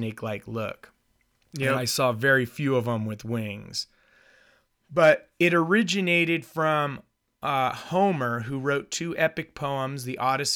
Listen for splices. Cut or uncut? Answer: uncut